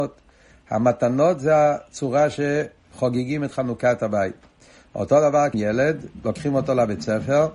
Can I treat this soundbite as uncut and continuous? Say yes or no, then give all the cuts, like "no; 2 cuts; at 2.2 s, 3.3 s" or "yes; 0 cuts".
no; 1 cut; at 5.5 s